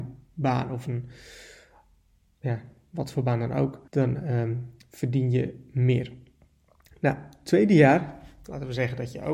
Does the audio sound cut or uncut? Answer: cut